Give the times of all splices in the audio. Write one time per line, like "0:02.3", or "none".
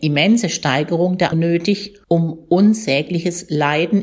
0:01.3
0:02.0

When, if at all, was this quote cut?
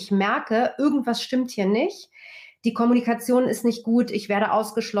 none

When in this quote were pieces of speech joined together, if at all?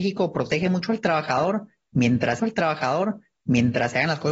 0:02.4

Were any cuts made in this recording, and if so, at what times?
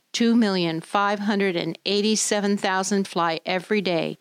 0:03.0

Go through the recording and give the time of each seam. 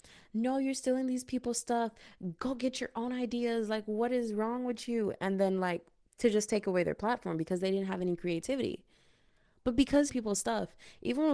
0:10.1

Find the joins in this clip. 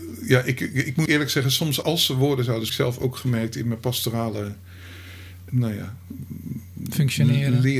0:01.1
0:01.8
0:02.7
0:05.5

